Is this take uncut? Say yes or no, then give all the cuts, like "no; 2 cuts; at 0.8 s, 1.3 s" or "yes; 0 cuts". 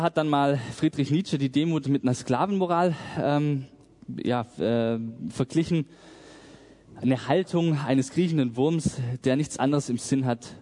yes; 0 cuts